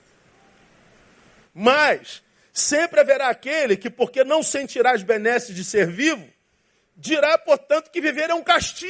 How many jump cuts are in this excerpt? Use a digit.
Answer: 0